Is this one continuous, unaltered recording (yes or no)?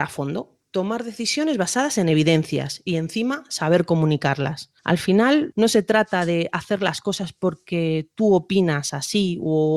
yes